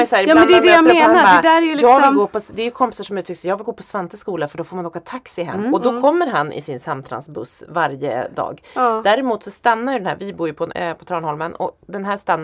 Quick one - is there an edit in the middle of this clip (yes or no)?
yes